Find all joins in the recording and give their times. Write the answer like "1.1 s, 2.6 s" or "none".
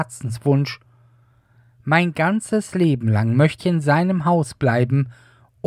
3.6 s